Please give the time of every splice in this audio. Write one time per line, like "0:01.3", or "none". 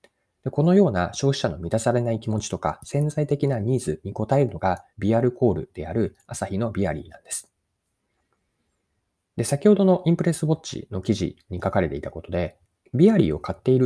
0:04.9